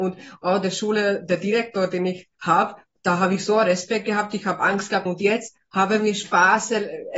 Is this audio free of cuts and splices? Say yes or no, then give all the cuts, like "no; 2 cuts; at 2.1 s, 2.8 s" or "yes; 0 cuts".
no; 3 cuts; at 2.3 s, 3.0 s, 5.1 s